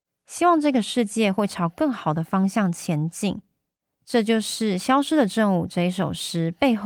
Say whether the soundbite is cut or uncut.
uncut